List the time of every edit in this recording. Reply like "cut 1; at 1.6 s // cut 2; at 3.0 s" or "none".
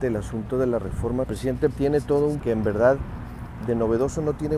cut 1; at 1.2 s // cut 2; at 1.7 s // cut 3; at 2.4 s // cut 4; at 3.6 s